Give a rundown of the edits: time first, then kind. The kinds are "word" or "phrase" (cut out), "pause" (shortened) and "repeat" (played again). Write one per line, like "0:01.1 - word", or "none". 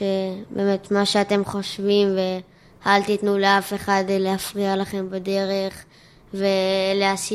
none